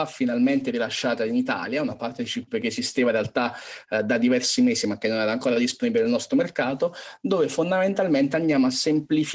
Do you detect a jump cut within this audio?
no; 0 cuts

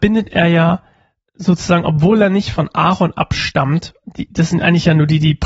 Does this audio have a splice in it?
no; 0 cuts

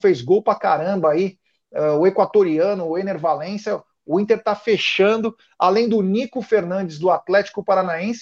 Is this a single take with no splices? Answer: yes; 0 cuts

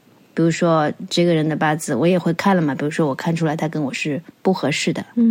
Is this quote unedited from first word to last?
no; 1 cut; at 4.3 s

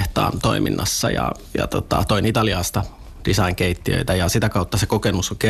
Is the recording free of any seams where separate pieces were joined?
yes; 0 cuts

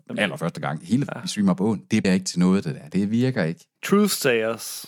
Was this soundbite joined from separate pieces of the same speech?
yes; 3 cuts; at 1.1 s, 2.0 s, 3.8 s

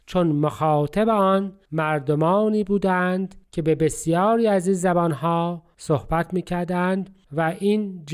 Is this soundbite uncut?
yes; 0 cuts

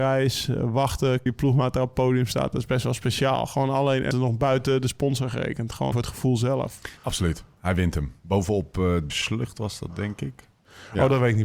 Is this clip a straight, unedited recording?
no; 5 cuts; at 1.3 s, 4.1 s, 5.9 s, 7.0 s, 9.1 s

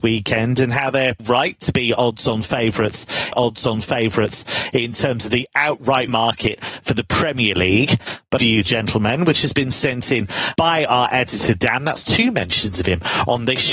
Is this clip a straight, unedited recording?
no; 5 cuts; at 1.2 s, 3.3 s, 6.1 s, 8.4 s, 10.6 s

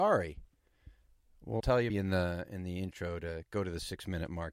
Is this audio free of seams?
no; 2 cuts; at 1.6 s, 1.9 s

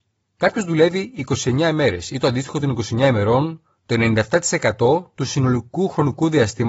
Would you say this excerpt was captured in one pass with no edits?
yes; 0 cuts

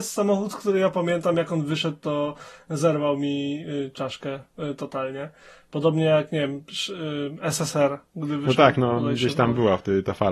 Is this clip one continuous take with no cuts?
yes; 0 cuts

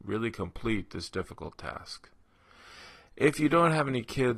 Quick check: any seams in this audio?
no; 0 cuts

